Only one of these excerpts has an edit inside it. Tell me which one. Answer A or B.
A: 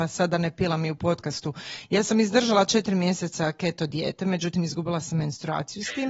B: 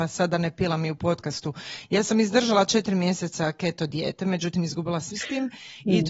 B